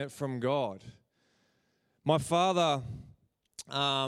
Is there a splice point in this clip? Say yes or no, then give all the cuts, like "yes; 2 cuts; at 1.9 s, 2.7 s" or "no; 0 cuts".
no; 0 cuts